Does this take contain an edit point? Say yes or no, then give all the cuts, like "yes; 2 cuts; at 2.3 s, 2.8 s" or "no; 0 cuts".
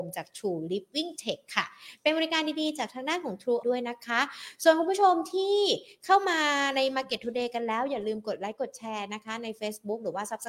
yes; 1 cut; at 3.6 s